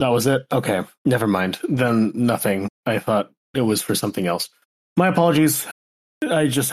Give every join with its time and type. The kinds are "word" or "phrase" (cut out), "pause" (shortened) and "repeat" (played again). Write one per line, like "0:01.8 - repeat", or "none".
none